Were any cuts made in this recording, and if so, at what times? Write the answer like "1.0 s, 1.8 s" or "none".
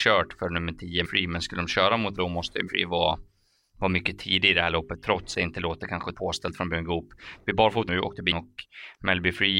1.0 s, 2.2 s, 2.7 s, 5.3 s, 6.1 s, 7.9 s, 8.3 s